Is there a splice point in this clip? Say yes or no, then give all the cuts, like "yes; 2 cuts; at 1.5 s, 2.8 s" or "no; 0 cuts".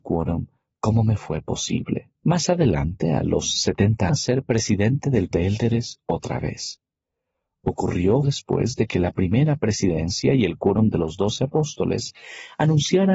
yes; 4 cuts; at 2.2 s, 4.1 s, 5.3 s, 8.2 s